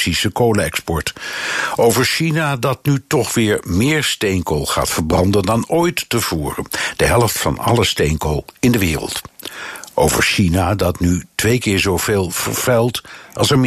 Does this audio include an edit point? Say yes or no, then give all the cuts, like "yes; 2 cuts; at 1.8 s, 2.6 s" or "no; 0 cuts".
no; 0 cuts